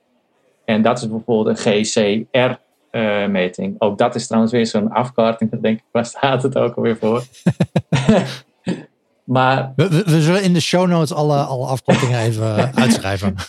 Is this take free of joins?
yes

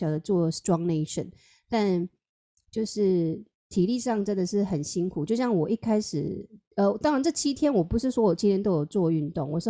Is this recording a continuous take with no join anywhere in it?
yes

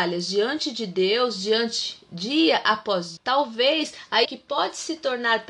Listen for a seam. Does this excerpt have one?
yes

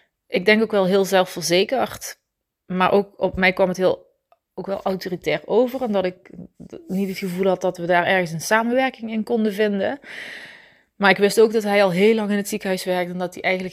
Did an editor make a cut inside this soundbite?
no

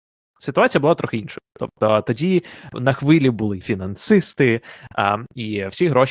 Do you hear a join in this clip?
yes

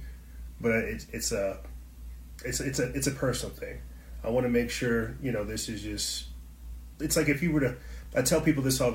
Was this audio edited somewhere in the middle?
no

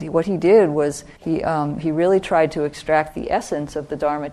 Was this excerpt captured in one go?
no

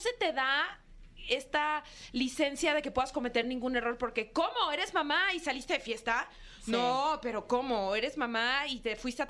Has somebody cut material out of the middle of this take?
no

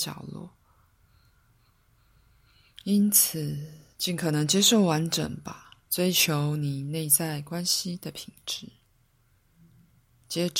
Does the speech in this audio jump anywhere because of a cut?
yes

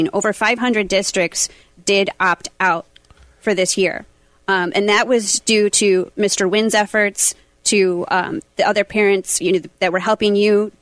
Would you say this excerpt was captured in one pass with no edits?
yes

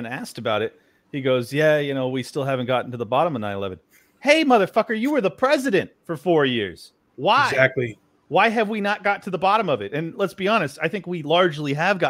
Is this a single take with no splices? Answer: yes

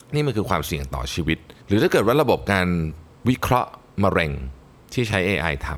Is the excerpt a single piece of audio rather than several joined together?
no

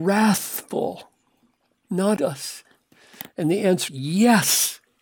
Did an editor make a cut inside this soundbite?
yes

